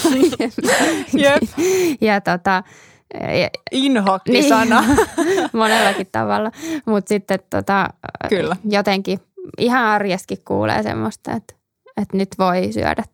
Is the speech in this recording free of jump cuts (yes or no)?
yes